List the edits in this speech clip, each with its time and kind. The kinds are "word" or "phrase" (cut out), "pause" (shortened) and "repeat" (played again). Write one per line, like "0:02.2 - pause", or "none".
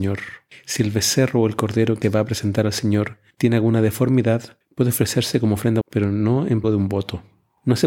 0:02.0 - word
0:05.8 - word
0:06.6 - word